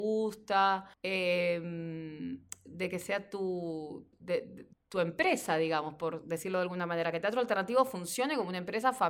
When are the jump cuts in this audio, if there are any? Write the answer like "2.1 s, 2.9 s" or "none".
0.9 s, 4.1 s, 4.7 s